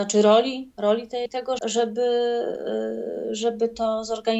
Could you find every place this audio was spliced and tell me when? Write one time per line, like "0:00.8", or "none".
0:01.3
0:01.6